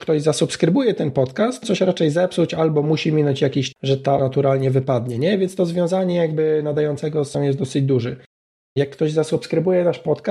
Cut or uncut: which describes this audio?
cut